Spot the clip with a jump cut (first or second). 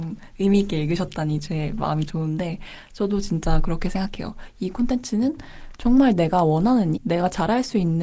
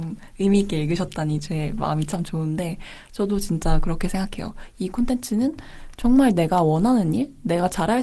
first